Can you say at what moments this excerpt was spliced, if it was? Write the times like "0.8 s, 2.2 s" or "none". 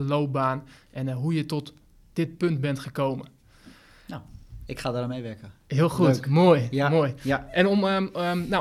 none